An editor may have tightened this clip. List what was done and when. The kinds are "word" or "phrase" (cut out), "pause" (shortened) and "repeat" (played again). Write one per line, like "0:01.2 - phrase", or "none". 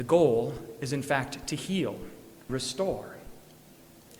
0:02.5 - word